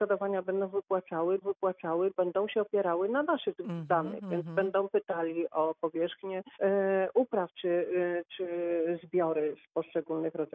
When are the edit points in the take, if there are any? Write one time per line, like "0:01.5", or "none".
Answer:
0:01.4
0:06.5

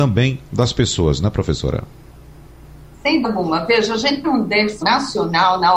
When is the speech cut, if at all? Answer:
0:03.2
0:04.2
0:04.8

